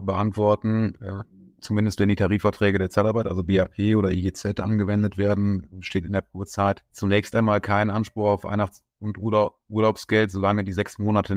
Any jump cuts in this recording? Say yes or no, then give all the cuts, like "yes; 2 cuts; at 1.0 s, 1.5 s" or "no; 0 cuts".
no; 0 cuts